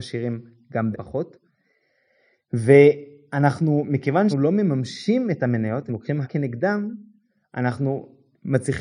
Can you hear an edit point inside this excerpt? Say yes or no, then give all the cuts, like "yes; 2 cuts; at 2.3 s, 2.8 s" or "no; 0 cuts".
yes; 4 cuts; at 0.9 s, 4.3 s, 5.9 s, 6.2 s